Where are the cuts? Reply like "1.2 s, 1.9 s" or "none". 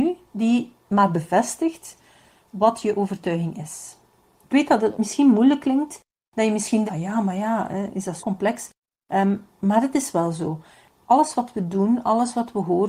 6.9 s, 8.2 s